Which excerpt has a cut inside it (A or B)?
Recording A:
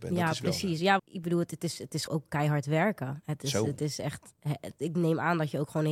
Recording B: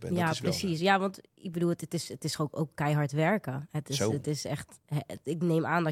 A